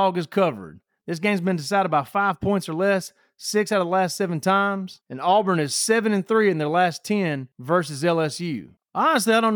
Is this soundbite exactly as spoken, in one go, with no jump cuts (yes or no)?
yes